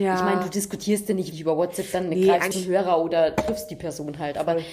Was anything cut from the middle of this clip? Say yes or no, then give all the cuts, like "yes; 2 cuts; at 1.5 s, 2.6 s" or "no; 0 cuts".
yes; 2 cuts; at 1.3 s, 2.5 s